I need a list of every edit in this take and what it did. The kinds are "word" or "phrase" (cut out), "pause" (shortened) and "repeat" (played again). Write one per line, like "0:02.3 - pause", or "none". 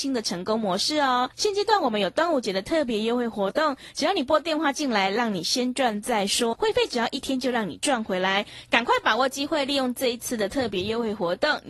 0:01.3 - pause
0:06.5 - word

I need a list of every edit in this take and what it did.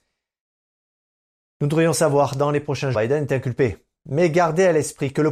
0:02.9 - phrase

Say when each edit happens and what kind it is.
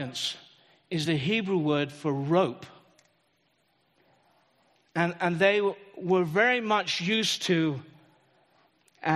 none

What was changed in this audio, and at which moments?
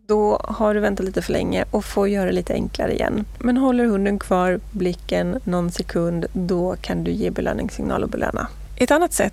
none

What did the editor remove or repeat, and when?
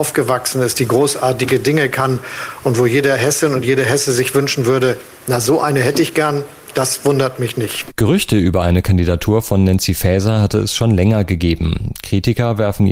none

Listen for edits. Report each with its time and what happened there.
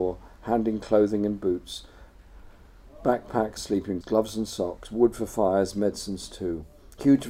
0:03.6 - word
0:04.0 - word

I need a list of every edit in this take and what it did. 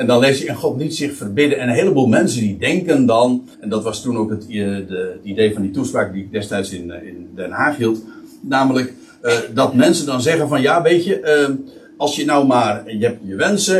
0:03.5 - pause

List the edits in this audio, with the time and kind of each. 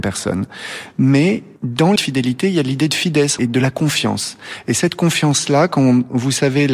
0:02.0 - word
0:03.4 - phrase

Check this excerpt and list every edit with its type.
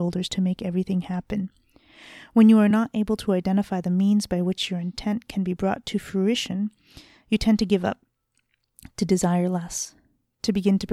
none

